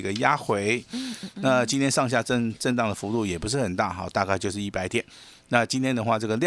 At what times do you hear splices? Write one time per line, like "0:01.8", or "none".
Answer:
none